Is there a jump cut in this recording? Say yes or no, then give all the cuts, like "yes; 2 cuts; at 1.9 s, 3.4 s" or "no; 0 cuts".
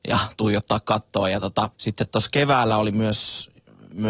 yes; 1 cut; at 1.7 s